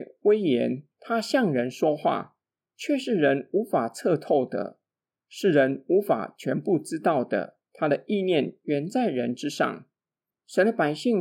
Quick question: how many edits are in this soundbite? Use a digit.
2